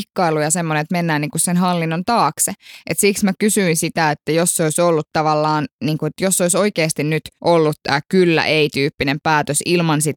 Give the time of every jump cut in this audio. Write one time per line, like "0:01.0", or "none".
0:07.4